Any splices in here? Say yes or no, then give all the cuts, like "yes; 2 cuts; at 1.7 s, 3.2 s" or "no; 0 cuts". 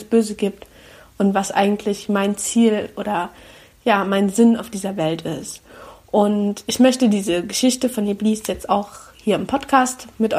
no; 0 cuts